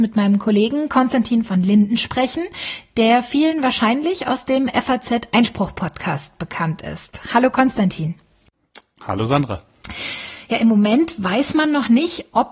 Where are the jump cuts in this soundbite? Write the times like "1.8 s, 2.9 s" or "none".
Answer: none

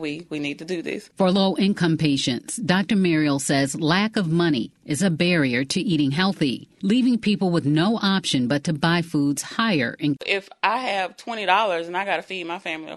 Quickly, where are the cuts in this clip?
10.2 s

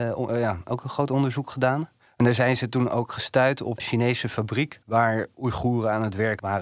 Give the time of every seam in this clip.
2.1 s, 3.8 s, 4.8 s

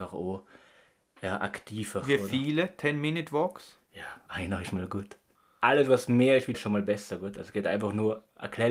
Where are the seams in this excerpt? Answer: 4.3 s, 6.5 s

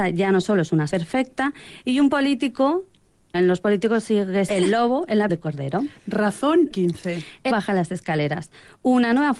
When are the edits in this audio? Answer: 0.9 s, 3.3 s, 4.5 s, 5.3 s, 6.7 s, 7.5 s

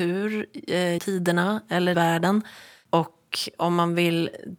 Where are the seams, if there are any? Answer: 1.0 s, 1.9 s

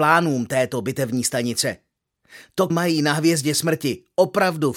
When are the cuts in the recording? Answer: 2.7 s

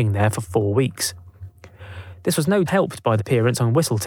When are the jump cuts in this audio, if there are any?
2.7 s, 3.2 s

